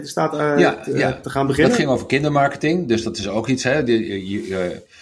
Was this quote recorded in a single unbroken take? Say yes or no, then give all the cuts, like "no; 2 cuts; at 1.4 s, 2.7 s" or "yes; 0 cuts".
yes; 0 cuts